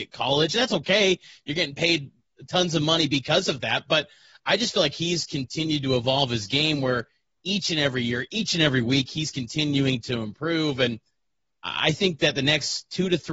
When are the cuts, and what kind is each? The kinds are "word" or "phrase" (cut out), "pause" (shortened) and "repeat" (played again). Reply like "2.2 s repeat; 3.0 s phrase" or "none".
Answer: none